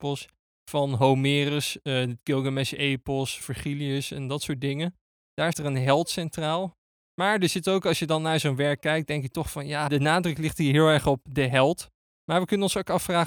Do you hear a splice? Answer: yes; 3 cuts; at 3.4 s, 5.5 s, 9.9 s

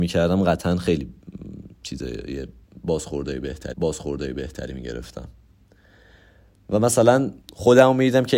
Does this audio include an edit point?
yes; 2 cuts; at 3.7 s, 7.4 s

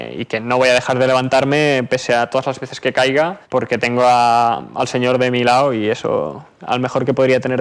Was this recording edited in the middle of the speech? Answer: yes; 2 cuts; at 3.4 s, 6.6 s

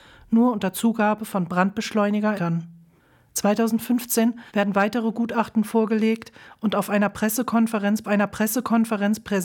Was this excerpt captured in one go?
no; 3 cuts; at 2.4 s, 4.5 s, 8.0 s

